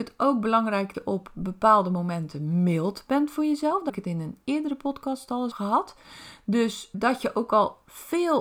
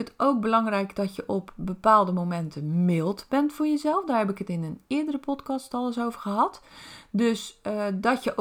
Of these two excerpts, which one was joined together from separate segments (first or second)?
first